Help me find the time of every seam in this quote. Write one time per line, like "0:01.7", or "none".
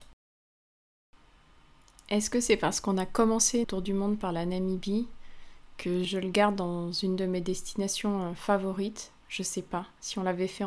0:03.6
0:06.0